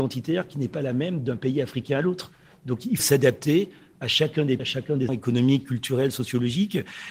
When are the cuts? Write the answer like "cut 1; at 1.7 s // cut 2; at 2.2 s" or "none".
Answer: cut 1; at 3.0 s // cut 2; at 4.6 s // cut 3; at 5.1 s